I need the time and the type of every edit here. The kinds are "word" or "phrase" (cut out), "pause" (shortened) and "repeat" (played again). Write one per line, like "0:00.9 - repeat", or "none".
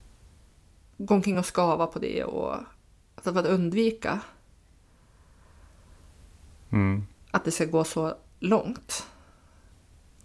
none